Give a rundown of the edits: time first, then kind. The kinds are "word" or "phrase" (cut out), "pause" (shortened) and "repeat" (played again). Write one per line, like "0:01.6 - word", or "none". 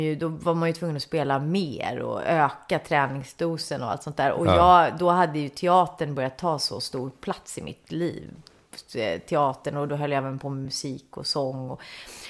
none